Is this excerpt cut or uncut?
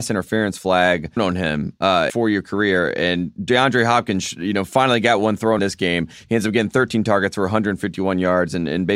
cut